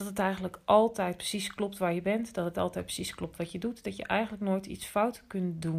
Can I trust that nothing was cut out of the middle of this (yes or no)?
yes